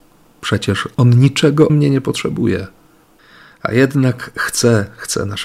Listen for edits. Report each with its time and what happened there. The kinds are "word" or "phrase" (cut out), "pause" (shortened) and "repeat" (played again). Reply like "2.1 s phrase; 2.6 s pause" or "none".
1.7 s word